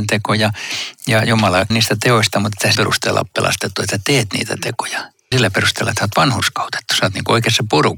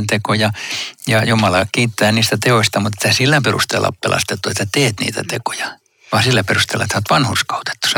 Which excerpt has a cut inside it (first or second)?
first